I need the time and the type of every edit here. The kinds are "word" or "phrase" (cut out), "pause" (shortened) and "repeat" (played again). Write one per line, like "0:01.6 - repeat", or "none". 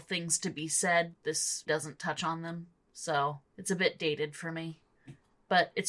0:01.7 - word
0:03.5 - pause

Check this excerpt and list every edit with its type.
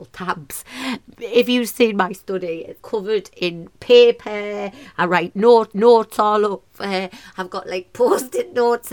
0:02.8 - word
0:05.7 - repeat

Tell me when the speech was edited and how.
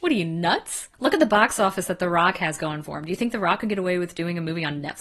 0:00.9 - pause

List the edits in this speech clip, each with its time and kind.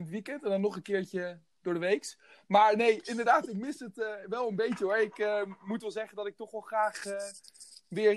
none

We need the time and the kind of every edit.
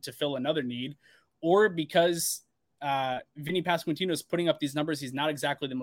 none

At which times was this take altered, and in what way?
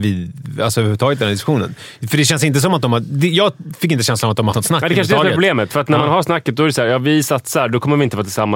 0:04.5 - word

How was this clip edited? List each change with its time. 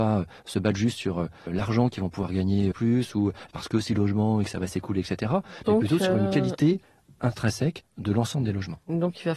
0:01.5 - word
0:02.7 - word
0:03.5 - phrase
0:03.9 - phrase

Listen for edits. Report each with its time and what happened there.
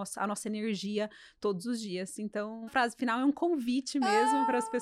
0:02.7 - phrase

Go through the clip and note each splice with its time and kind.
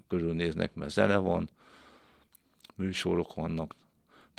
none

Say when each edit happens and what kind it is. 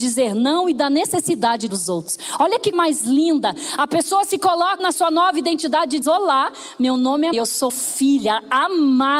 0:01.7 - word
0:02.7 - word
0:04.8 - word
0:06.0 - word
0:07.3 - word
0:07.7 - word

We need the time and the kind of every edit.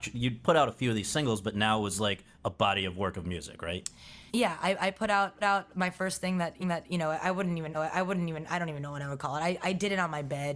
0:04.3 - pause
0:05.4 - repeat
0:06.6 - repeat
0:07.7 - repeat

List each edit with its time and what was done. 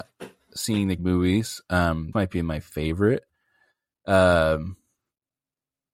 0:01.0 - word
0:02.1 - word

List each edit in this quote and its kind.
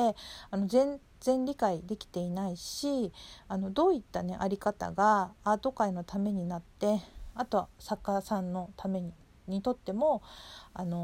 none

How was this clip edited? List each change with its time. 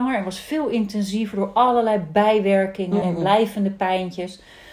0:03.0 - word

